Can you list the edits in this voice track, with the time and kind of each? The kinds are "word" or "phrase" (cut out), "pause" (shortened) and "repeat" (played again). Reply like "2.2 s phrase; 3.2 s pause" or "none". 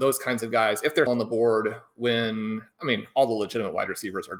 1.1 s word